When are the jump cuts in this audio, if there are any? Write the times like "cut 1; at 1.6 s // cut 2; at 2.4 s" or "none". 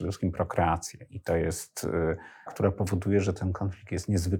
cut 1; at 2.5 s